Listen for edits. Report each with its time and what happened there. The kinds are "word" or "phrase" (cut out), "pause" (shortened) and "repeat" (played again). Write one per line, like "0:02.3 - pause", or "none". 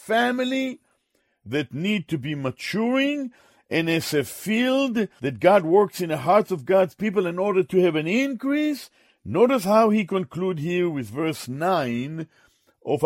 0:05.2 - word